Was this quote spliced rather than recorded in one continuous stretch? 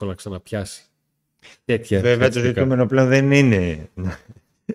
no; 0 cuts

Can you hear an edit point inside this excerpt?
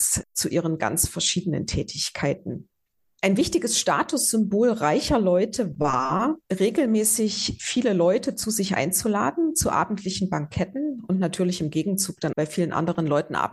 yes; 2 cuts; at 6.4 s, 12.3 s

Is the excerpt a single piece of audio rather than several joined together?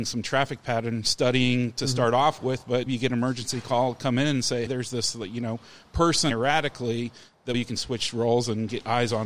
no; 4 cuts; at 2.9 s, 4.7 s, 6.3 s, 7.5 s

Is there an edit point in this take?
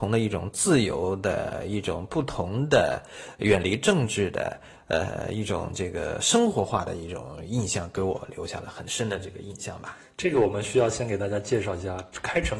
no; 0 cuts

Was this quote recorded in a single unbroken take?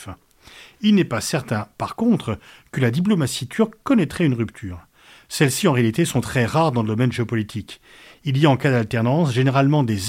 yes; 0 cuts

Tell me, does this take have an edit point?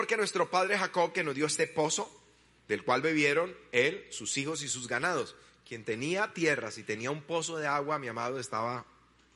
no; 0 cuts

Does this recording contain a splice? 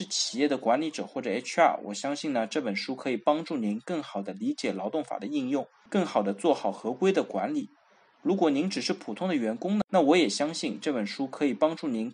no; 0 cuts

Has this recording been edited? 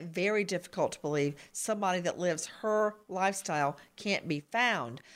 no; 0 cuts

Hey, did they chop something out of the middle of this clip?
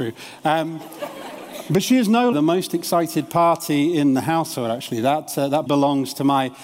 yes; 2 cuts; at 2.3 s, 5.7 s

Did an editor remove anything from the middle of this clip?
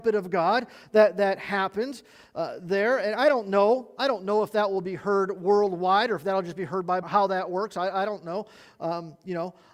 yes; 1 cut; at 7.0 s

